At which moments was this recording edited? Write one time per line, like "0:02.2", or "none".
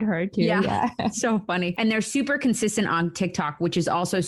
none